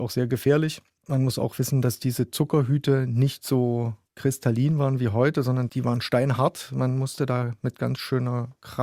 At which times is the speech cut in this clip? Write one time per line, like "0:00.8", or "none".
0:04.0